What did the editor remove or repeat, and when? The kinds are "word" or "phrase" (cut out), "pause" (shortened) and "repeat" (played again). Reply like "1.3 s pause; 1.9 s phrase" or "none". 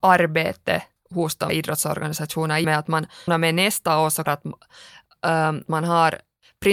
1.5 s word; 2.6 s word; 3.3 s word; 4.3 s word; 5.7 s word